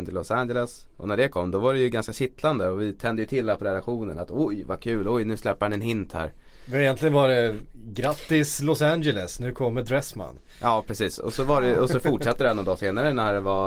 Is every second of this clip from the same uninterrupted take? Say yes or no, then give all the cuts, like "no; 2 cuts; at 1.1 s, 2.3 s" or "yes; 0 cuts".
yes; 0 cuts